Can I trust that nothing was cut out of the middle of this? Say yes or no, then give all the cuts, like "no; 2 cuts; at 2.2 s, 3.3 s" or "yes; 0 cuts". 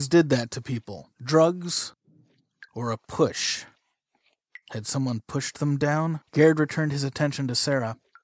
no; 2 cuts; at 1.1 s, 6.3 s